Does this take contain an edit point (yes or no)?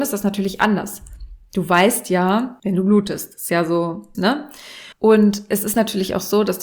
yes